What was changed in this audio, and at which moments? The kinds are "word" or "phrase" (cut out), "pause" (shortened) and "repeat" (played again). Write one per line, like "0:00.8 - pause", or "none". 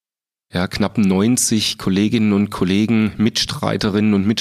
none